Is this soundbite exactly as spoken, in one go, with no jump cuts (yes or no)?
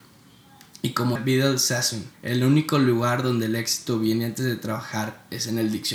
no